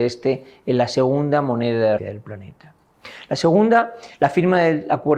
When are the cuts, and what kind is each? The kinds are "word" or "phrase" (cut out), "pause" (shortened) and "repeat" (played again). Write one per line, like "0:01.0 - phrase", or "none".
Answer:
0:02.0 - word
0:04.1 - pause